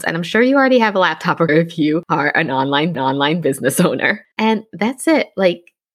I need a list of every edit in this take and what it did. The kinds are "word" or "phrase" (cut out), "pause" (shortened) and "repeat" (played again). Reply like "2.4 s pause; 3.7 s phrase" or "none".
1.5 s word; 2.9 s repeat; 4.3 s pause

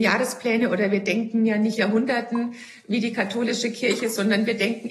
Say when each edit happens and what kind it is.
1.8 s word

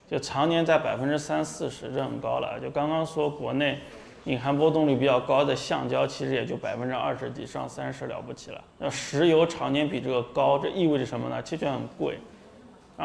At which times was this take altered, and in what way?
8.7 s pause

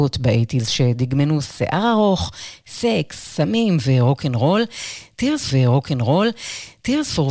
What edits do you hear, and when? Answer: 5.5 s repeat

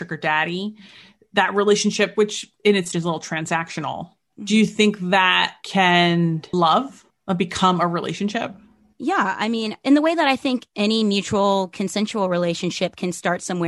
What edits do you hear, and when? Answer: 2.6 s word; 2.9 s word; 6.5 s word

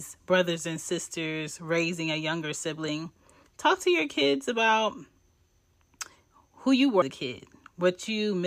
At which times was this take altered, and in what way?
7.0 s word

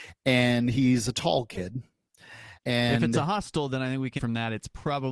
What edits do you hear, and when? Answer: 2.6 s pause; 4.2 s word

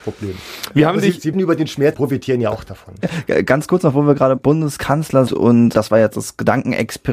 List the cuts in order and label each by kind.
1.3 s word; 1.9 s phrase; 4.4 s word; 5.3 s word; 5.7 s word

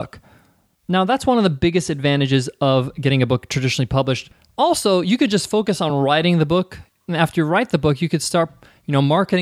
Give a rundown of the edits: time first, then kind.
none

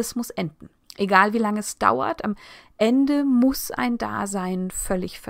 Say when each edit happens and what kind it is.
none

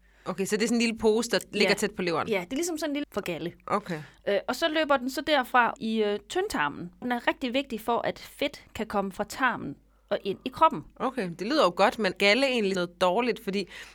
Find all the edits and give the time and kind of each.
3.0 s word; 5.8 s word; 7.0 s word; 12.1 s word; 12.7 s word

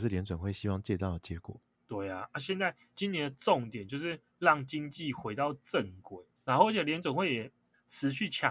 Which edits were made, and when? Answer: 6.4 s pause

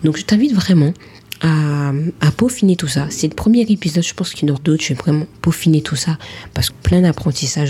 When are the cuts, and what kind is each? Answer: 4.6 s word; 6.7 s phrase

